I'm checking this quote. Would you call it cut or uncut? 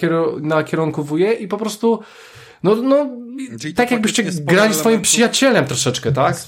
uncut